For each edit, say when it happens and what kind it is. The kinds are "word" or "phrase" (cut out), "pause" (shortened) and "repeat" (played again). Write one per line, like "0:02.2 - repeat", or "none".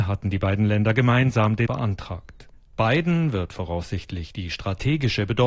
0:01.7 - word